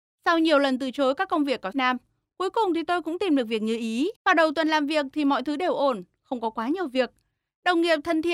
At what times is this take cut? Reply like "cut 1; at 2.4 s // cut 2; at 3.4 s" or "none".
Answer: cut 1; at 1.7 s // cut 2; at 4.2 s